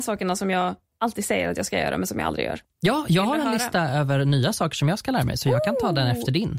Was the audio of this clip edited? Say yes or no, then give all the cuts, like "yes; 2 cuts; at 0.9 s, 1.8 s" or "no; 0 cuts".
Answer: no; 0 cuts